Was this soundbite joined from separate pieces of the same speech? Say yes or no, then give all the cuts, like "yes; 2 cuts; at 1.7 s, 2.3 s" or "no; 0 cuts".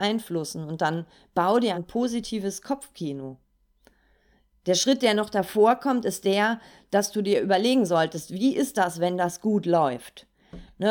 yes; 1 cut; at 1.7 s